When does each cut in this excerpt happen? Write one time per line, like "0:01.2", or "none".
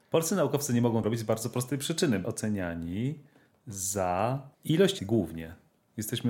0:01.0
0:02.2
0:04.5
0:05.0

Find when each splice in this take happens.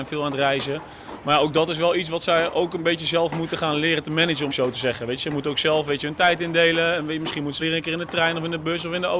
0:04.5
0:07.6

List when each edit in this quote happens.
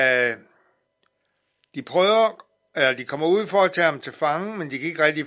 none

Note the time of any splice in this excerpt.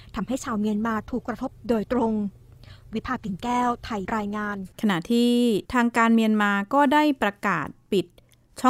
0:04.1
0:04.7
0:05.7

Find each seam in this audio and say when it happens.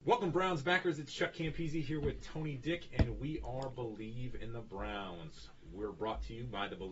none

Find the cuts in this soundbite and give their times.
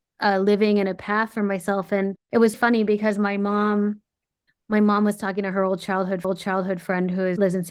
0:02.2
0:02.5
0:06.2

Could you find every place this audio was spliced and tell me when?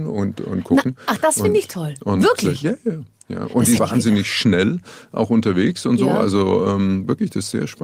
0:03.8

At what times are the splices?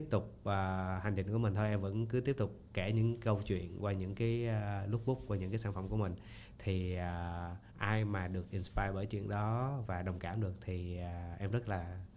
0:07.7

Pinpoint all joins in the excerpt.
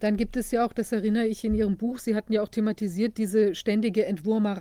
none

